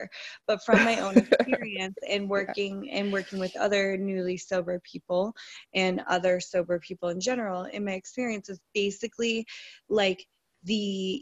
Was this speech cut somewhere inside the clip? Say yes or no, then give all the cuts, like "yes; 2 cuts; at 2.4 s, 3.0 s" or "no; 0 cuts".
no; 0 cuts